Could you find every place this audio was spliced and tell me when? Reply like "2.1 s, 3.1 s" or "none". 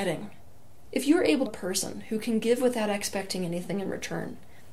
1.5 s